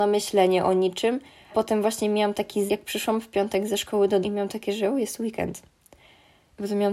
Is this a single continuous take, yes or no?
no